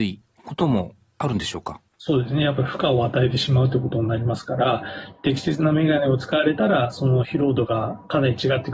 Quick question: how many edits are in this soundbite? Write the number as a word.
one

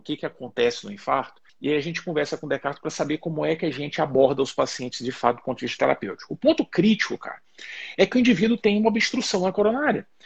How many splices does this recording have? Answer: one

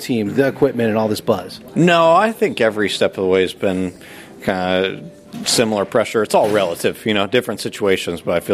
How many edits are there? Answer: zero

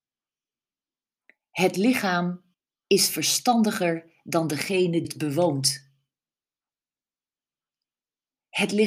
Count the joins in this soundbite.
two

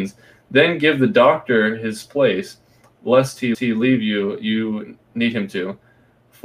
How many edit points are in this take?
one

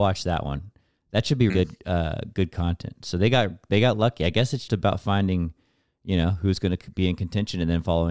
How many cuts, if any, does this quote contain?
two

